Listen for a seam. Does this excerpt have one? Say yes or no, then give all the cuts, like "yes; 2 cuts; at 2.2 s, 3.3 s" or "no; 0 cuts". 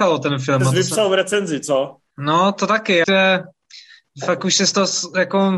yes; 2 cuts; at 2.1 s, 3.0 s